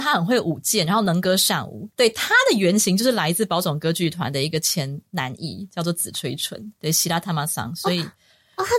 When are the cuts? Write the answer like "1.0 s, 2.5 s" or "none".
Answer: 1.9 s, 6.8 s